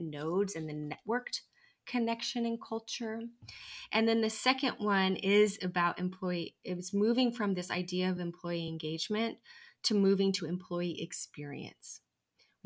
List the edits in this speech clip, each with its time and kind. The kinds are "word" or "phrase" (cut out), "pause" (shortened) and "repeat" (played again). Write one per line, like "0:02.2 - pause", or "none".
none